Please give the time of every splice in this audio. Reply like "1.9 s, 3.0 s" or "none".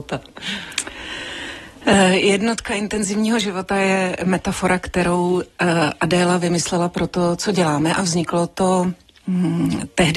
none